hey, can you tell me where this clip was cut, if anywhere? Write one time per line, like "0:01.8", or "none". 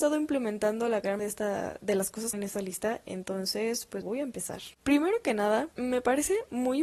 0:01.2
0:02.3
0:04.0
0:04.7
0:05.7